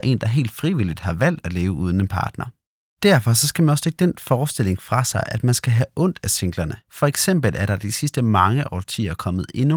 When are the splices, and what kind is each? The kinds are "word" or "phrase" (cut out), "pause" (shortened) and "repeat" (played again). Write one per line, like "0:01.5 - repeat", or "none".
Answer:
none

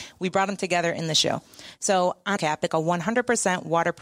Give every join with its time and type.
0:02.4 - phrase
0:02.7 - word

